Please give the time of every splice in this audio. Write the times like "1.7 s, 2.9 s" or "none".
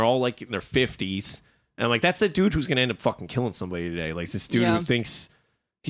none